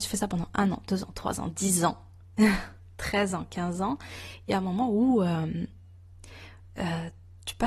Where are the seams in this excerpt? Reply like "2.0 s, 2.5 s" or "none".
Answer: none